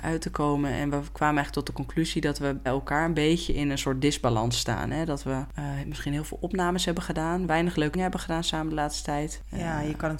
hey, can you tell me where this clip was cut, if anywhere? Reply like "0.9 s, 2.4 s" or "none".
2.7 s, 7.9 s